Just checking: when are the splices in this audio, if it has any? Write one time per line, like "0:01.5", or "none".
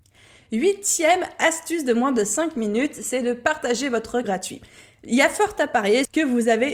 0:04.2